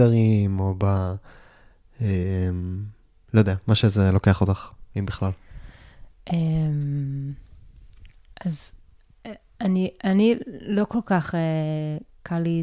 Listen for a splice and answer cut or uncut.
uncut